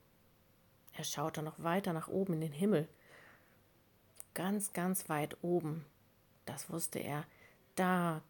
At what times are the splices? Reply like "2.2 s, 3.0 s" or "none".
none